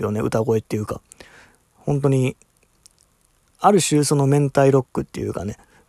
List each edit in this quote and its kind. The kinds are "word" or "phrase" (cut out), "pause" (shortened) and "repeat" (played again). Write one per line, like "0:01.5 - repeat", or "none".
none